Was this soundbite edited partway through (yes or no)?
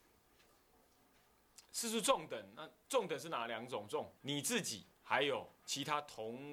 yes